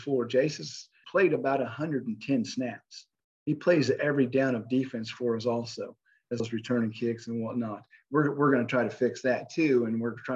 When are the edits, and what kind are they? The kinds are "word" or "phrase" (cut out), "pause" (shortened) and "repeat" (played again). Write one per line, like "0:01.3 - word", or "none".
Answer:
0:01.0 - word
0:06.4 - word